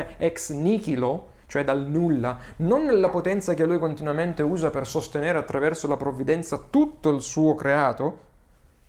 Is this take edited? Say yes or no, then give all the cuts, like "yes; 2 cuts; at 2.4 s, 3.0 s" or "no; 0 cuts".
no; 0 cuts